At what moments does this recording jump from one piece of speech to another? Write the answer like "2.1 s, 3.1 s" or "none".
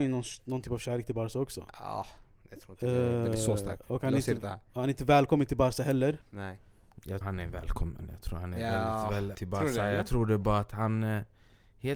6.2 s, 7.2 s, 9.3 s